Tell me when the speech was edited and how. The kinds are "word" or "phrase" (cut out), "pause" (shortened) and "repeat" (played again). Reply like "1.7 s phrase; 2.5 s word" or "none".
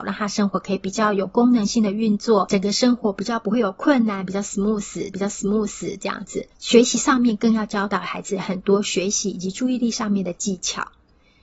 5.1 s repeat; 6.5 s pause